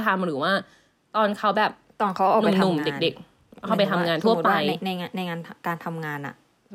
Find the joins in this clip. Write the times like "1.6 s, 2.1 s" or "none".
none